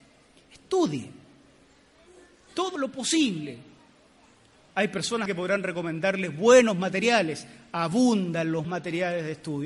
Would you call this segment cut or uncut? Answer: cut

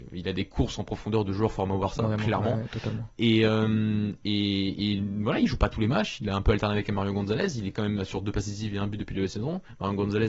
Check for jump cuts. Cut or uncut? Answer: uncut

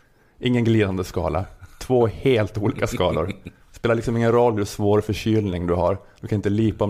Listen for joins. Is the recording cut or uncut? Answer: cut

